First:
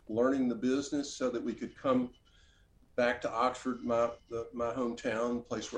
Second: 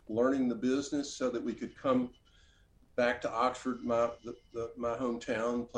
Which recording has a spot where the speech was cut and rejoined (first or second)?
first